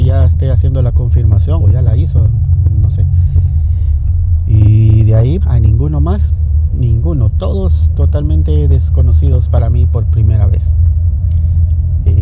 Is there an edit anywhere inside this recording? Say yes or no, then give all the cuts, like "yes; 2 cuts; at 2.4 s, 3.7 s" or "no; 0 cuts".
yes; 2 cuts; at 1.6 s, 5.4 s